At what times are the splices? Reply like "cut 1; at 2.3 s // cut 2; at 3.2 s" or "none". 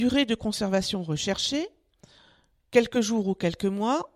none